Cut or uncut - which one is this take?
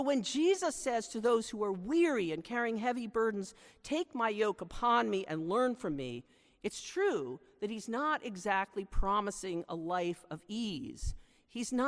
uncut